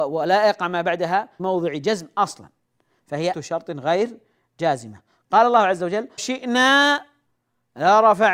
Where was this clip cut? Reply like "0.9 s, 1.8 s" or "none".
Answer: 1.4 s, 3.3 s, 6.2 s